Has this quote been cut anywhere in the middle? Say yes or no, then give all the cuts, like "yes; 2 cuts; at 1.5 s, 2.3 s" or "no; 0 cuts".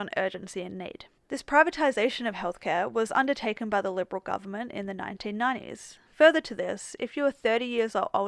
yes; 2 cuts; at 1.2 s, 6.0 s